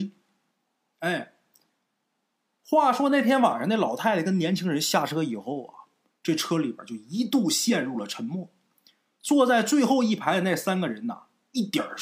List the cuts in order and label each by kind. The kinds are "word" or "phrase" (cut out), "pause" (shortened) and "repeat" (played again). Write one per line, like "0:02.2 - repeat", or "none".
none